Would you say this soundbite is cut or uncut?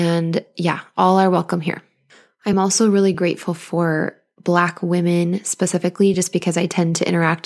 uncut